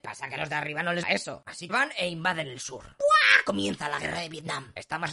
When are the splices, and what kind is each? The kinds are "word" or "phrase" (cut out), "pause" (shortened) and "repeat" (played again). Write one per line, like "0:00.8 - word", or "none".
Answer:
0:01.0 - word
0:01.7 - word